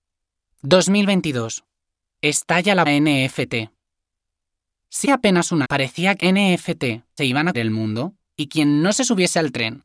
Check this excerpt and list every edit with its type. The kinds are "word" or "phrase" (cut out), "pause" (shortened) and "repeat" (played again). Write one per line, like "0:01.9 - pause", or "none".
0:02.9 - word
0:05.0 - word
0:05.6 - word
0:06.2 - word
0:07.2 - word
0:07.5 - word
0:08.5 - word

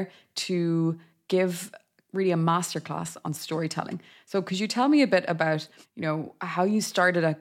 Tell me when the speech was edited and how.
0:05.8 - pause

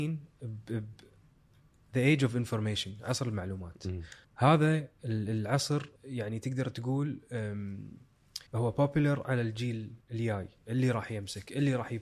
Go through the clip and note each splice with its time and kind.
0:04.2 - pause
0:06.0 - pause
0:08.5 - pause
0:10.0 - pause

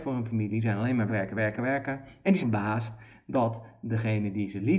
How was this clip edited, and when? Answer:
0:01.1 - word
0:01.6 - word
0:02.4 - phrase

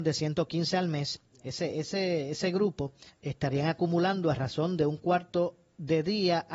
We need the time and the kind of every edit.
0:03.1 - pause

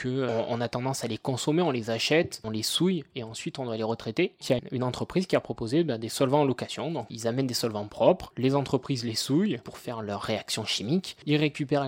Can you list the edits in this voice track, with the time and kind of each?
0:04.4 - word

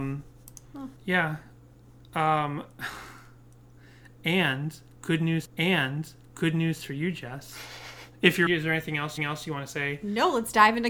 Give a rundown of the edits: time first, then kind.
0:01.0 - pause
0:05.5 - repeat
0:08.5 - phrase
0:09.2 - repeat

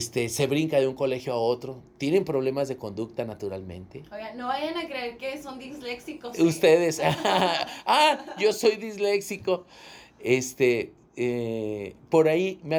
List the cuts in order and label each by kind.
none

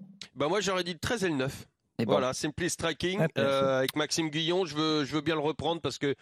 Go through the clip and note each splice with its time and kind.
none

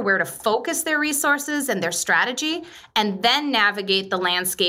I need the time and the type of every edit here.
none

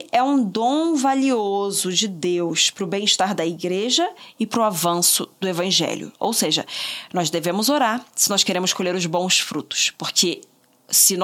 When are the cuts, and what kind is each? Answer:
none

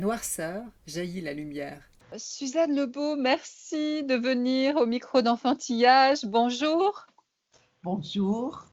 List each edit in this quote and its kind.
none

